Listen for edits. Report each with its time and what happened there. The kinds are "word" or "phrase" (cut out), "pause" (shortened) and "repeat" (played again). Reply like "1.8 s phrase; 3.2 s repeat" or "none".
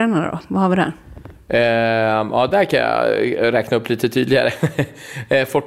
none